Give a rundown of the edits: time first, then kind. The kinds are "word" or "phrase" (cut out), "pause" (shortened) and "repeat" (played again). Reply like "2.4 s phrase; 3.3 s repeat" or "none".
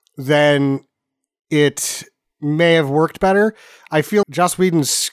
4.2 s word